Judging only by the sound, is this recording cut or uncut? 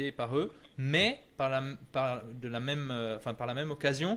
uncut